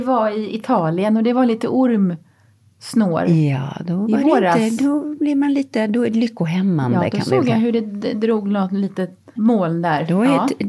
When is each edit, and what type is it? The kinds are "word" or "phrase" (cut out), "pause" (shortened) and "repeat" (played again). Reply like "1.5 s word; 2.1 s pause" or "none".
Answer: 6.1 s word; 9.3 s word